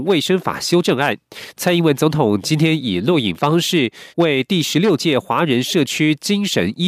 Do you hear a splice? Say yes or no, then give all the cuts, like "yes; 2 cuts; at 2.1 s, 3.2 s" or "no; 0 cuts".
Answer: yes; 1 cut; at 4.1 s